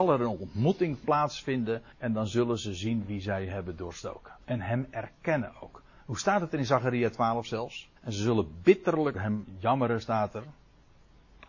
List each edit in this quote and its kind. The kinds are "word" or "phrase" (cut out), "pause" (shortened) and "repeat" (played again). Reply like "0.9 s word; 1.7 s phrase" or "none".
1.9 s pause; 4.4 s pause; 8.0 s pause; 9.1 s word